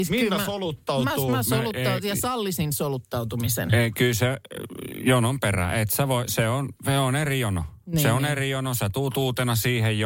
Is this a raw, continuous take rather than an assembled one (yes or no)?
yes